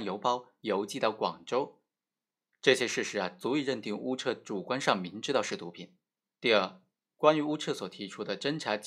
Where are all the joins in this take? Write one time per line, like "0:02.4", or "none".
0:06.2